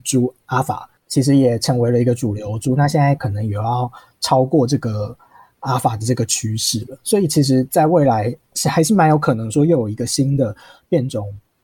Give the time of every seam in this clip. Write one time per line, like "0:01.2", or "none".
0:01.0
0:03.2